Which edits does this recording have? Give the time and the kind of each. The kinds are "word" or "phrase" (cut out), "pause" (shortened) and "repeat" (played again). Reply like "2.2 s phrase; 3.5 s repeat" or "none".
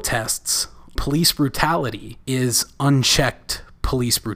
1.0 s word; 2.2 s pause